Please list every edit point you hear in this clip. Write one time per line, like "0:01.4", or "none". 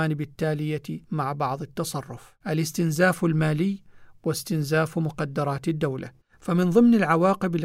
0:01.0
0:02.4
0:06.2